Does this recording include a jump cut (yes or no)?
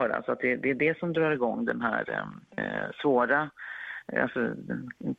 yes